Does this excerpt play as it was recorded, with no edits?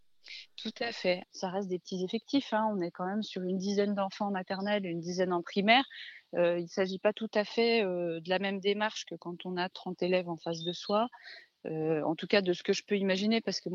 yes; 0 cuts

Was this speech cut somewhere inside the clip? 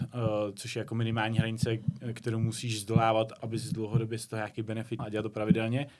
yes; 1 cut; at 5.0 s

